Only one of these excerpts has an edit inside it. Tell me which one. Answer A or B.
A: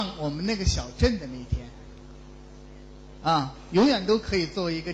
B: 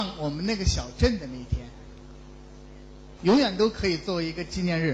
B